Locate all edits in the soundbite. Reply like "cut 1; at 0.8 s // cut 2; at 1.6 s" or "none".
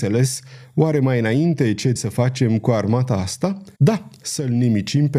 cut 1; at 2.0 s // cut 2; at 3.7 s